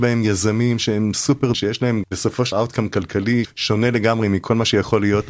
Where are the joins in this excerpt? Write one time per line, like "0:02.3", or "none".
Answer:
0:01.5
0:02.0
0:02.5
0:03.4